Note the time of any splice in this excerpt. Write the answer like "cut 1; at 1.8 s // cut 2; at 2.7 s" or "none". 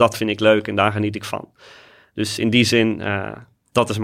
none